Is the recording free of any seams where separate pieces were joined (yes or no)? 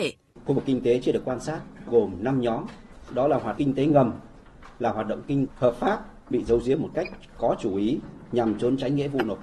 no